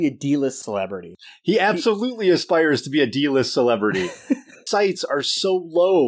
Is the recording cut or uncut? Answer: cut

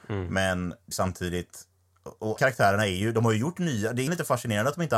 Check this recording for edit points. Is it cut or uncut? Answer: cut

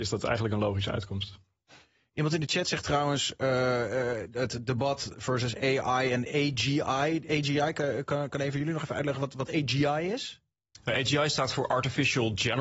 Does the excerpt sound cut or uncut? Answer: uncut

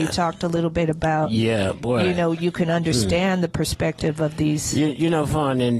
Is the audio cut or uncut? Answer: uncut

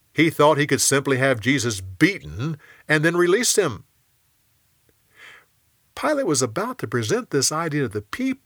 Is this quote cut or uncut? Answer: uncut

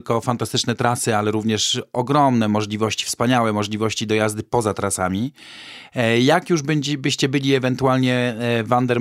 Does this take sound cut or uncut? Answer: uncut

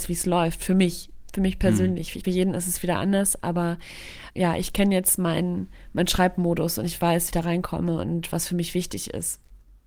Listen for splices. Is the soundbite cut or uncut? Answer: cut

